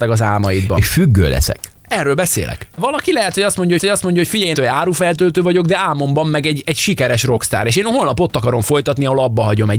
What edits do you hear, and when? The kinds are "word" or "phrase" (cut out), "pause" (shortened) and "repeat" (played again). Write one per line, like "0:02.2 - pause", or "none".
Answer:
0:03.8 - repeat
0:04.5 - phrase